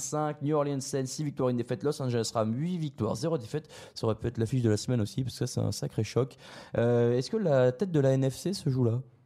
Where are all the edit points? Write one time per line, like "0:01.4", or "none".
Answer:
none